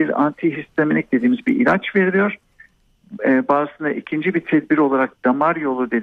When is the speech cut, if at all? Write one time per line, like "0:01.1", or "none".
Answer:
none